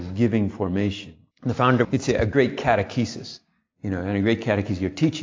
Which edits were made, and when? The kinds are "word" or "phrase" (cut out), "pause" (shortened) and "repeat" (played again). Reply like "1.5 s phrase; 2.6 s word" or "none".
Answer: 1.3 s pause; 1.8 s phrase